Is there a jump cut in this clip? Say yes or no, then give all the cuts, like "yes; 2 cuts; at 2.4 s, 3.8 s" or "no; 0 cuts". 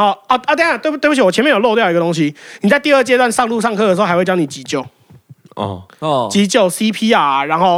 no; 0 cuts